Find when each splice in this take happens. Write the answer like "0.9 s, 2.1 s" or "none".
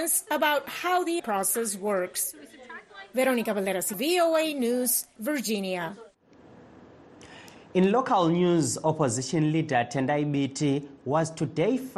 1.2 s, 3.9 s, 5.2 s